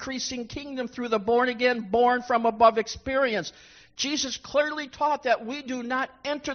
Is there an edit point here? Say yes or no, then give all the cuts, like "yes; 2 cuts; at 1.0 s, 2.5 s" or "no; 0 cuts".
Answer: no; 0 cuts